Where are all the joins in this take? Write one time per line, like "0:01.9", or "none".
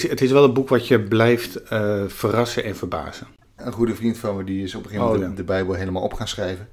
none